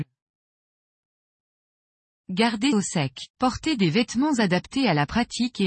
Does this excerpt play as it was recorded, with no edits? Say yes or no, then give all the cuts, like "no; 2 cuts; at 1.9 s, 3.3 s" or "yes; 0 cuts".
no; 2 cuts; at 2.7 s, 3.3 s